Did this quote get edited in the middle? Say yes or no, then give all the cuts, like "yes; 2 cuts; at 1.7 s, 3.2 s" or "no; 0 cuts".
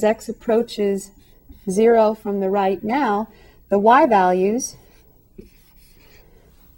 no; 0 cuts